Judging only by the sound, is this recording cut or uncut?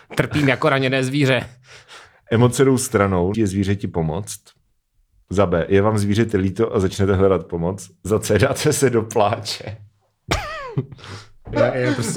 cut